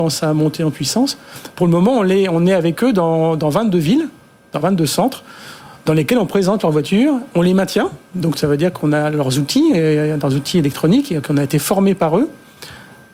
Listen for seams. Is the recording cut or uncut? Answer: uncut